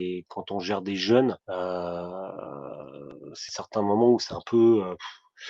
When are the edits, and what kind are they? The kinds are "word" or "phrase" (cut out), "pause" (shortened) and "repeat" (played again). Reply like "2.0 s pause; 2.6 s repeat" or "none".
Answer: 1.4 s pause; 3.5 s phrase